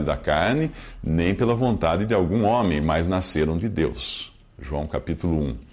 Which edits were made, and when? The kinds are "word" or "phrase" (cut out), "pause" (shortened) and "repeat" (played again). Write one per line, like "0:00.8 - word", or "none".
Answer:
none